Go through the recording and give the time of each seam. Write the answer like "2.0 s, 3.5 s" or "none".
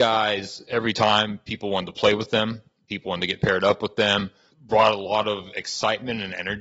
4.5 s